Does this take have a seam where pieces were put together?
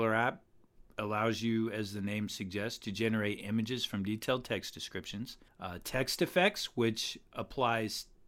yes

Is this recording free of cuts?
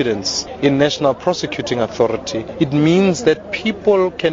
yes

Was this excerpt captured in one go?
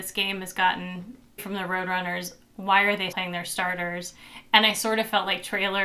no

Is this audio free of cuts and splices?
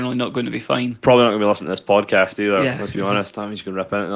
yes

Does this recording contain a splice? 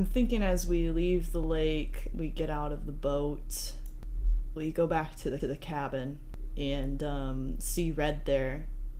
yes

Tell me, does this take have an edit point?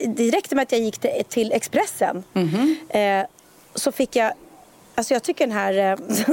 no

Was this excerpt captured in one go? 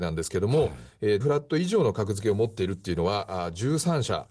no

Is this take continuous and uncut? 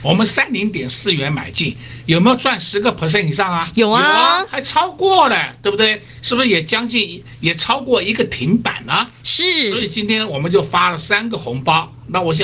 yes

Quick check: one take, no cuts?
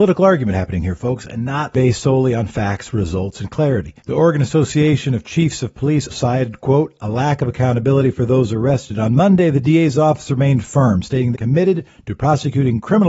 no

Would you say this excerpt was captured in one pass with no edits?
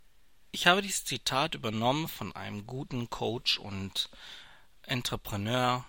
yes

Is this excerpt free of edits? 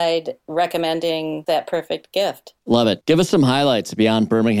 no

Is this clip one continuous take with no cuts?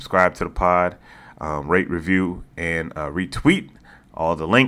yes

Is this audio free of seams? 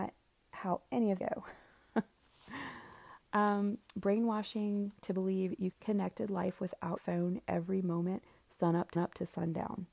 no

